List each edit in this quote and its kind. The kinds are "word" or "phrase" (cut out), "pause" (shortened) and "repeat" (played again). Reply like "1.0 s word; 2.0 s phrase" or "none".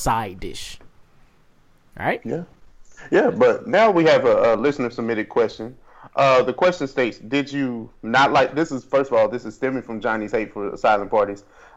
none